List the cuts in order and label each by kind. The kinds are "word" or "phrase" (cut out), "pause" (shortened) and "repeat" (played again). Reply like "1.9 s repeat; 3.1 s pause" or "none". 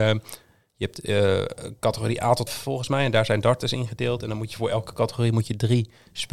2.5 s word